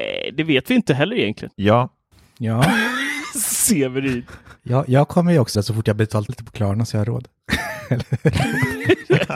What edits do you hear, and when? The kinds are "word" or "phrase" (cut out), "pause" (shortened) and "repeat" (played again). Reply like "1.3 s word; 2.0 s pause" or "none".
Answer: 5.5 s word; 6.3 s word